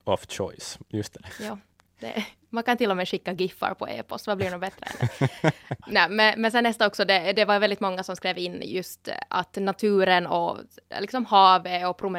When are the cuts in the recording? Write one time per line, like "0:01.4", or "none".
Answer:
none